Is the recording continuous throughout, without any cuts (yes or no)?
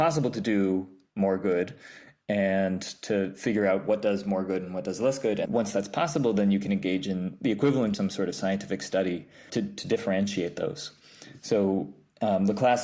no